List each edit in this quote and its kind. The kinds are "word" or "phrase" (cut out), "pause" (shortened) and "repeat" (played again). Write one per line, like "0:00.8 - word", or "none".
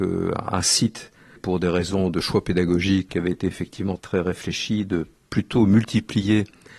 0:01.4 - word
0:03.1 - word
0:04.0 - word